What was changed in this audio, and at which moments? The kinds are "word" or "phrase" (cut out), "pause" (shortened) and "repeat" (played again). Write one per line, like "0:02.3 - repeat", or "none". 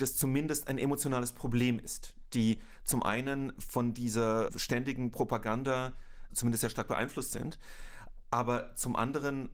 none